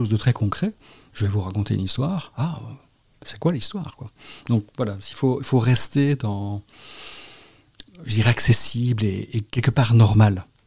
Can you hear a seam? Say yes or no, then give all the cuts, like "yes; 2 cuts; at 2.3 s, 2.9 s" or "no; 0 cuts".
no; 0 cuts